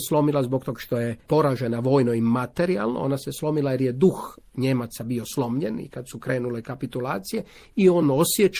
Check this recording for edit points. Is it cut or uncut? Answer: cut